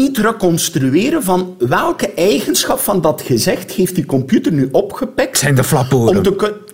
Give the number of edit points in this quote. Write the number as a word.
zero